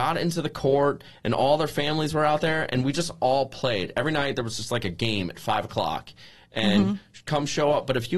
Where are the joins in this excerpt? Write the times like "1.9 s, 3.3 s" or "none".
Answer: none